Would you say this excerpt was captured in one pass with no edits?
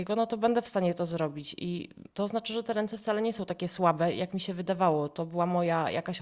no; 1 cut; at 2.1 s

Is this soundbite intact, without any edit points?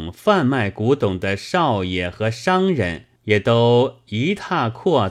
no; 1 cut; at 3.2 s

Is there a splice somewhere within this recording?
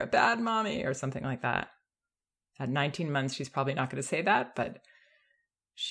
no; 0 cuts

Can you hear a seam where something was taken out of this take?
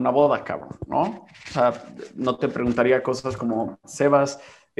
no; 0 cuts

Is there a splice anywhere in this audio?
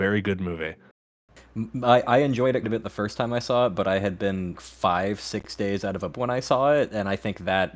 yes; 4 cuts; at 2.0 s, 2.6 s, 4.6 s, 6.1 s

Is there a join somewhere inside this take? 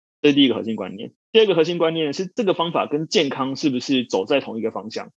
yes; 1 cut; at 1.2 s

